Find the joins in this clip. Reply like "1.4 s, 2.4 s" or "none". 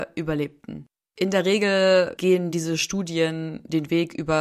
none